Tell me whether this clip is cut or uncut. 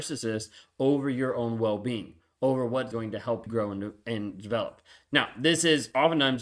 cut